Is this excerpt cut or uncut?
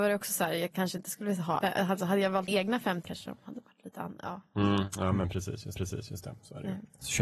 cut